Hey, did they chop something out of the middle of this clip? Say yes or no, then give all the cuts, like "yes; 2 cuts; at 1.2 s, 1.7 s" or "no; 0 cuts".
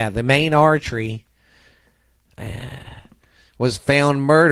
no; 0 cuts